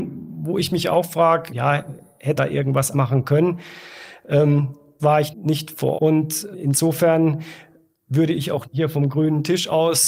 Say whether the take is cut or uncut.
cut